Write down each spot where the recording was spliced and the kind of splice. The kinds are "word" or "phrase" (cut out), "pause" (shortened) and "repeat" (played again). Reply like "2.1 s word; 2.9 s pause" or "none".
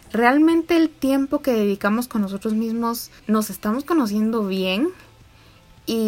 3.2 s pause